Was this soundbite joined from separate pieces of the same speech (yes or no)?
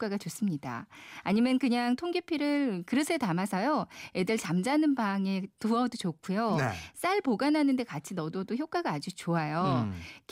no